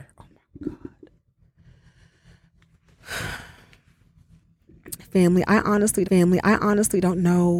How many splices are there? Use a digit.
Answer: 1